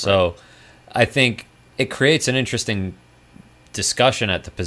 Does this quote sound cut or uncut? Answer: uncut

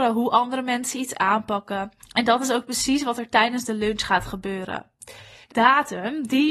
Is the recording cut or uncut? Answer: cut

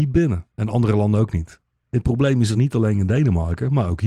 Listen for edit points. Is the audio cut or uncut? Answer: uncut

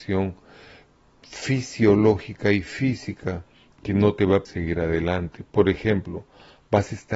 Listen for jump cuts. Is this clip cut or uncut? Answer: cut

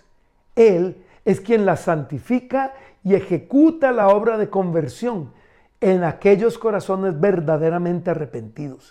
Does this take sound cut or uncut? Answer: uncut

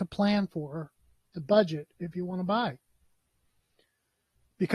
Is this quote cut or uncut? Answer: uncut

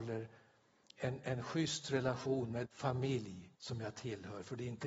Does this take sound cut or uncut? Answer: cut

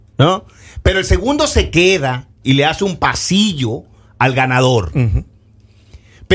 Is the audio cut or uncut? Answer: uncut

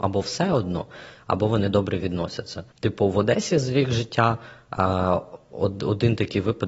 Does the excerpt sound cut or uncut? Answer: cut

